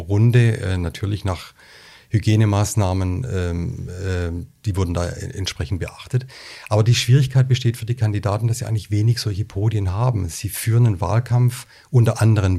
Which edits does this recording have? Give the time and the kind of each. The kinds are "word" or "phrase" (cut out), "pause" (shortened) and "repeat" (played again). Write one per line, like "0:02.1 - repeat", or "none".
none

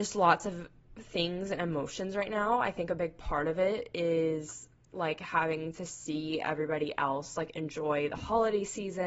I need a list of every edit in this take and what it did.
none

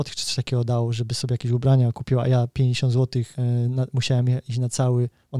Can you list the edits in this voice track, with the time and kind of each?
0:03.3 - pause

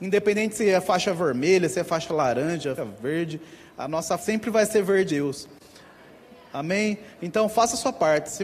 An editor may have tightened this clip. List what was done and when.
0:02.8 - word
0:04.2 - word
0:05.1 - word

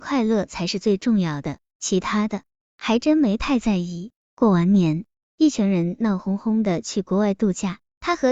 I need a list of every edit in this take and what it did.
none

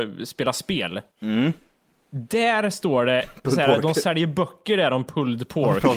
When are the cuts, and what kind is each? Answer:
0:01.1 - pause

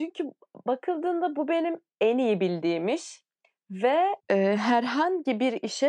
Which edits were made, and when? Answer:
0:04.2 - pause

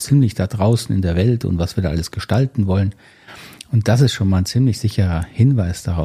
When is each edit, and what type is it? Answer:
none

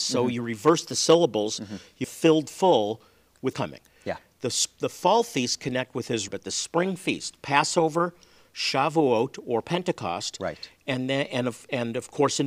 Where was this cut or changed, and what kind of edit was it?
0:02.0 - word
0:03.5 - phrase
0:06.3 - word

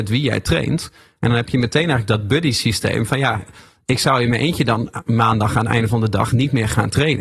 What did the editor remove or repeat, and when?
none

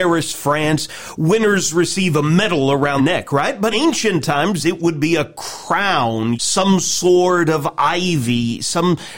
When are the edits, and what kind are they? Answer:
0:03.0 - word
0:03.7 - word
0:06.3 - word

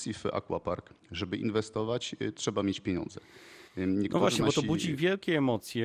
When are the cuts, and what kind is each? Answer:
0:01.0 - pause
0:03.7 - pause

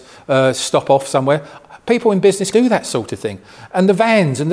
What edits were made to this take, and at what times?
0:02.5 - word

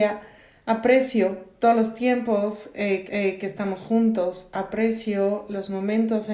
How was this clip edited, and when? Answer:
0:01.6 - word
0:03.1 - repeat

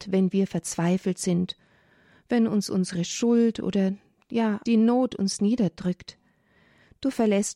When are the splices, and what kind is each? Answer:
0:04.6 - word

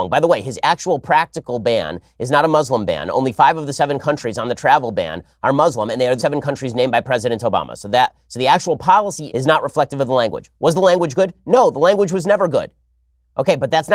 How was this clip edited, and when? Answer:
0:06.2 - word
0:09.3 - word

